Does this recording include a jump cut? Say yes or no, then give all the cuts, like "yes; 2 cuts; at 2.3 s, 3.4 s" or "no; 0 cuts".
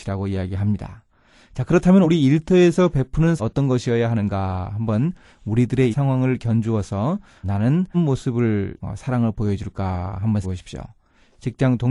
yes; 7 cuts; at 2.0 s, 3.4 s, 5.9 s, 7.4 s, 7.9 s, 8.8 s, 10.4 s